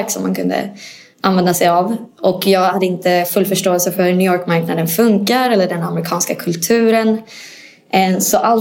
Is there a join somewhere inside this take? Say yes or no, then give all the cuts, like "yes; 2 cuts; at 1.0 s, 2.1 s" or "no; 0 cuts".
no; 0 cuts